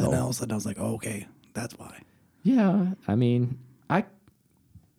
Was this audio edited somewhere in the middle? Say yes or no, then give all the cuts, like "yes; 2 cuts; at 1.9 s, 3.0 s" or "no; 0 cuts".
no; 0 cuts